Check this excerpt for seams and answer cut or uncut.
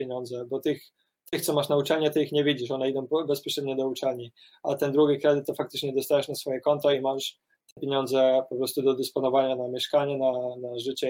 uncut